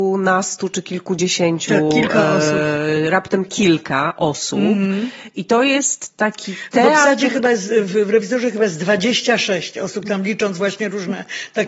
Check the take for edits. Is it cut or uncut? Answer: uncut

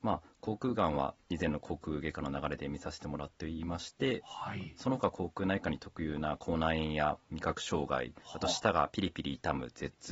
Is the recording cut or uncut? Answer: cut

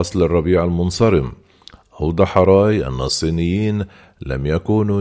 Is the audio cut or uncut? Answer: uncut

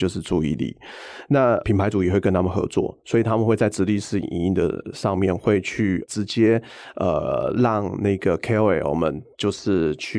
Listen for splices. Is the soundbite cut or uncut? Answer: uncut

